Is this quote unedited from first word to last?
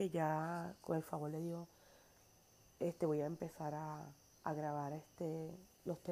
yes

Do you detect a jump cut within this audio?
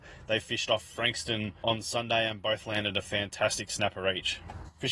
no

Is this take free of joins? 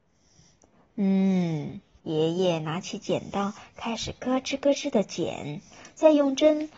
no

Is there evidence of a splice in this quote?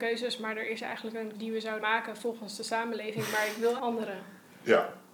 yes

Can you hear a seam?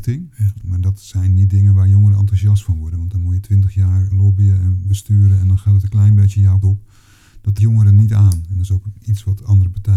yes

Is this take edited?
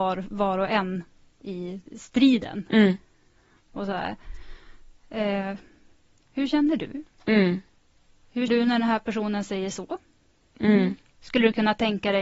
yes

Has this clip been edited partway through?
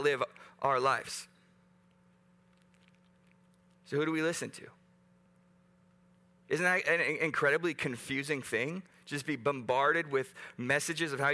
no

